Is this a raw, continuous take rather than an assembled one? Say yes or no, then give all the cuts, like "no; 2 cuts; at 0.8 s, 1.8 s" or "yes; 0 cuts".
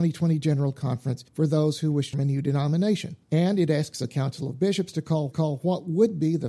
no; 4 cuts; at 1.3 s, 2.1 s, 3.2 s, 5.3 s